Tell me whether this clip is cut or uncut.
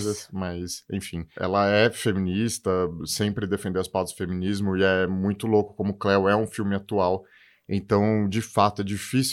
uncut